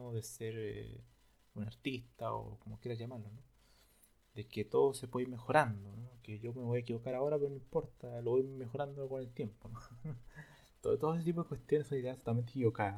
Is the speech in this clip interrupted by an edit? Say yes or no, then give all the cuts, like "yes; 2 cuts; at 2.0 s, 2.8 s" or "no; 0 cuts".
no; 0 cuts